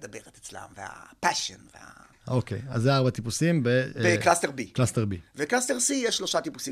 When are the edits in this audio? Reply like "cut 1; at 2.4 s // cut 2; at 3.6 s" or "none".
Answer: none